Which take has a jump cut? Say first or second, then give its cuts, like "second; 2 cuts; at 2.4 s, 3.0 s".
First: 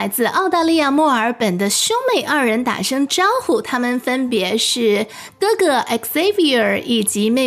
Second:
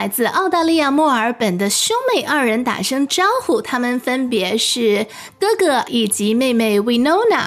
second; 1 cut; at 5.9 s